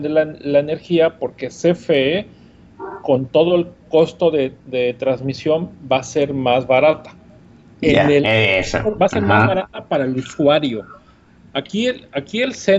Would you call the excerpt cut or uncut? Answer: uncut